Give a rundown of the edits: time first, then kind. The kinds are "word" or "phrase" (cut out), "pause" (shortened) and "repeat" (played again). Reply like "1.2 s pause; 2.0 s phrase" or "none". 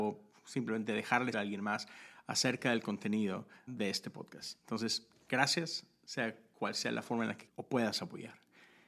1.3 s word; 3.7 s word; 7.5 s word